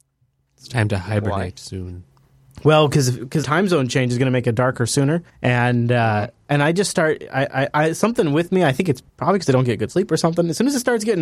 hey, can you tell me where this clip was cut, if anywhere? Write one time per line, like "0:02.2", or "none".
0:03.4
0:05.3
0:07.5
0:09.1

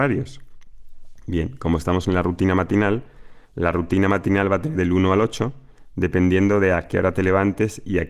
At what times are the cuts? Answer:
0:03.4
0:04.7

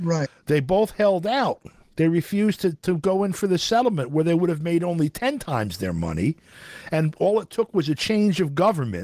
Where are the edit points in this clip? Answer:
none

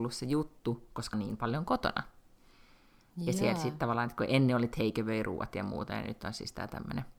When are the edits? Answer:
0:01.1

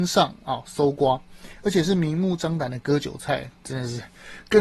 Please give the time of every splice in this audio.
0:03.5

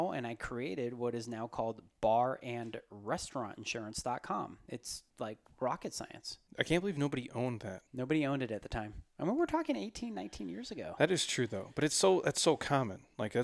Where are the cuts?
0:05.1
0:06.5
0:07.9

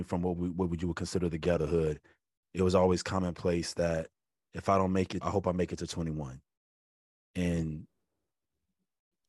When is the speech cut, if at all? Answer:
0:01.6
0:02.4
0:05.2

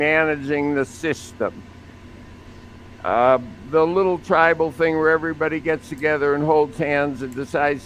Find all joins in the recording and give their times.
none

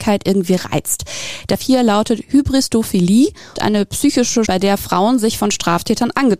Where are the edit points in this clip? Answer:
0:01.6
0:03.6
0:04.5

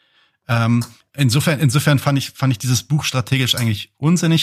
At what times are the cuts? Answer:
0:01.0

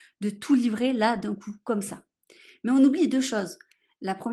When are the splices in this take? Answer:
none

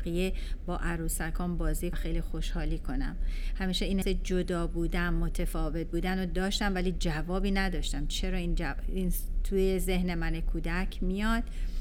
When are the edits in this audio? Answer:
0:01.9
0:04.0

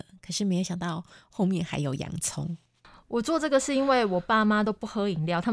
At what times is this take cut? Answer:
none

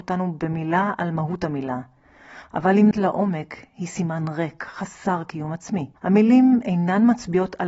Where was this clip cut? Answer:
0:02.9
0:06.0

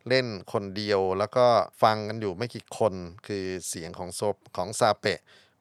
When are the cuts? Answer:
0:01.7
0:04.5

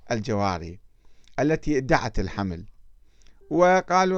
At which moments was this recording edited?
none

